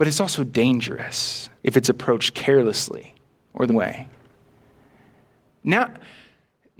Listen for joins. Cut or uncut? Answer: cut